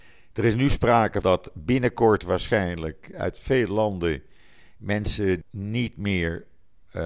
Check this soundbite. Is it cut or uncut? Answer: cut